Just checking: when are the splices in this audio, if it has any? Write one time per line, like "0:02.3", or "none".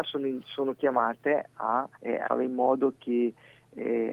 0:01.9
0:02.2